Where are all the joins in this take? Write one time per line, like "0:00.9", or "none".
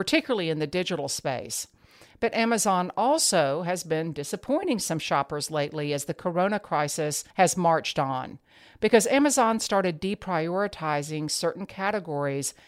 none